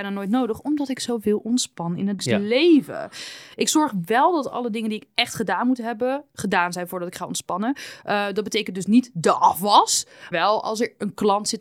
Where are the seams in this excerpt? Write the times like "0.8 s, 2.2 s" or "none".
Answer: 2.2 s, 10.3 s